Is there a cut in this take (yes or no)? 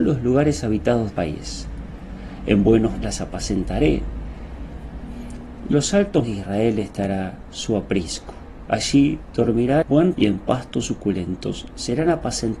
yes